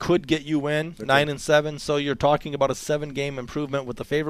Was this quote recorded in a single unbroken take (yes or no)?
yes